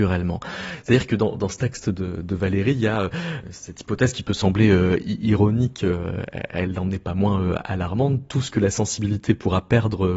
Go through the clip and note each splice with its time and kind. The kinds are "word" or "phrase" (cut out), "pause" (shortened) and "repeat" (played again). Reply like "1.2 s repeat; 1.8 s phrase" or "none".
3.4 s word

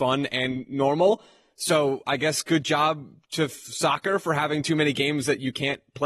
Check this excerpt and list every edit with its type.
none

